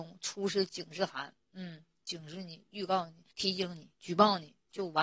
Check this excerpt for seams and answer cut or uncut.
cut